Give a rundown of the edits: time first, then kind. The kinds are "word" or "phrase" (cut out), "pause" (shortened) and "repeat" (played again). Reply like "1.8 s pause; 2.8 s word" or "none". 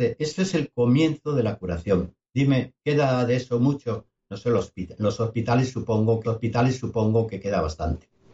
6.2 s repeat